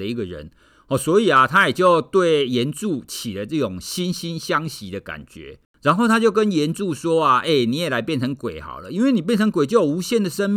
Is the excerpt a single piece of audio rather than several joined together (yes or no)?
no